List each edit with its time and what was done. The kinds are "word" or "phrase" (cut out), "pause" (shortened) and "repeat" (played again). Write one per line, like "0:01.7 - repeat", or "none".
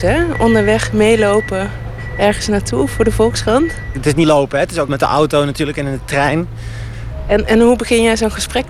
0:04.2 - word
0:04.9 - word